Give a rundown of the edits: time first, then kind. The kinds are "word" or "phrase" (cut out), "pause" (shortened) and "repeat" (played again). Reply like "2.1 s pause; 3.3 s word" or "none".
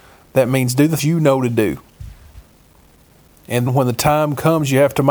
1.0 s word; 3.7 s word